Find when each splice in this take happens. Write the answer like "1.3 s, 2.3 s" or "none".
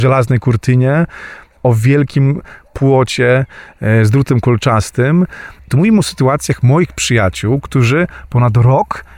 none